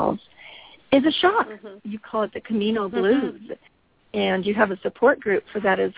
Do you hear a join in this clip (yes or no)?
no